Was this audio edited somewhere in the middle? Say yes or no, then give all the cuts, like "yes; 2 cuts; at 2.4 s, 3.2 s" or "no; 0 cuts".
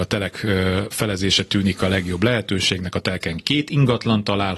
no; 0 cuts